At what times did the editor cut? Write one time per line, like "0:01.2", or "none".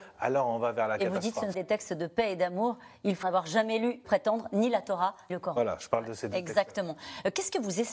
0:01.5
0:03.2
0:04.0
0:05.3